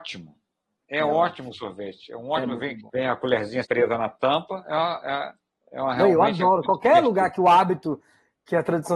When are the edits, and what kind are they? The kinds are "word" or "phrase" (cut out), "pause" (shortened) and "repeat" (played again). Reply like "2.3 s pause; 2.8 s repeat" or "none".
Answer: 2.9 s pause; 3.6 s word; 5.5 s pause